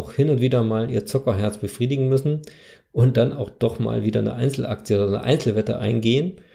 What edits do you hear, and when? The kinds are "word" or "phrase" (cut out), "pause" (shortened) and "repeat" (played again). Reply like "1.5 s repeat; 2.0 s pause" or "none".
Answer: none